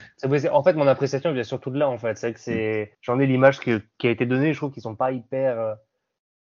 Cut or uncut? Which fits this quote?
cut